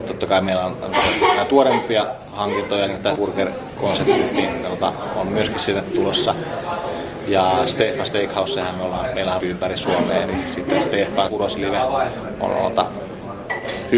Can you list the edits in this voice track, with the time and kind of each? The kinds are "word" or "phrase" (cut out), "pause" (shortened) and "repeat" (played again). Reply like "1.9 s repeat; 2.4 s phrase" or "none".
3.2 s word; 9.4 s phrase; 11.3 s word